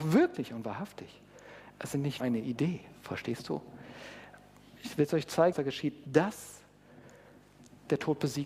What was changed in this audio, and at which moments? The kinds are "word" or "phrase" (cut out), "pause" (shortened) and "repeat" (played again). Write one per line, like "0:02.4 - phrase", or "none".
0:02.2 - word
0:05.5 - phrase